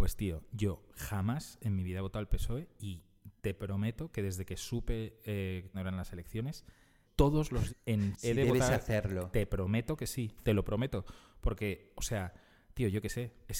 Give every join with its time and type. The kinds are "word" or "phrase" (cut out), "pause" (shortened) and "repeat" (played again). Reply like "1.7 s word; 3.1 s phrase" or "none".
5.7 s word; 7.1 s word; 7.7 s word; 8.1 s word